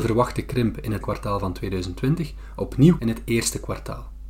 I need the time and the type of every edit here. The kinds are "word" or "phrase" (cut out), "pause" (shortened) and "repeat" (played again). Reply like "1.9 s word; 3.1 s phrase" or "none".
1.0 s word; 3.0 s word